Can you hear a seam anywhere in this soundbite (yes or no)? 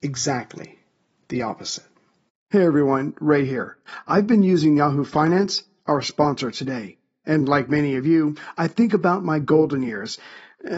no